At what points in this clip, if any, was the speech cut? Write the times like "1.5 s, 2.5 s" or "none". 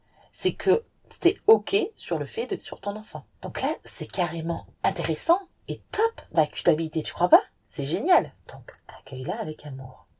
2.6 s, 3.3 s, 4.7 s, 6.4 s